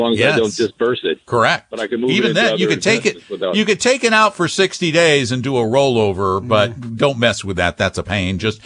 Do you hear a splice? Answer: yes; 1 cut; at 1.2 s

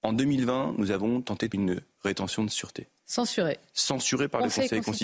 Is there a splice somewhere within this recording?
yes; 1 cut; at 1.5 s

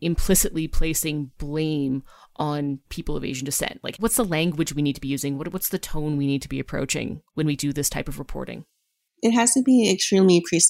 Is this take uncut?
yes; 0 cuts

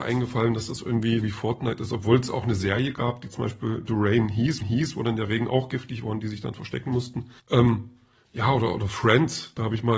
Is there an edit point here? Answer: yes; 3 cuts; at 1.2 s, 4.6 s, 7.4 s

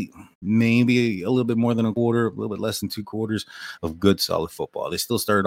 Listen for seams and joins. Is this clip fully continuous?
yes; 0 cuts

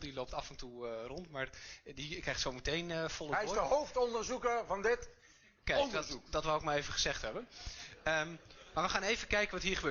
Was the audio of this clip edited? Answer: no; 0 cuts

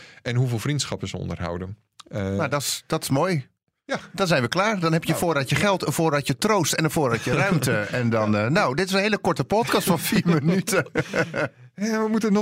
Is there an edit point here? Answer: no; 0 cuts

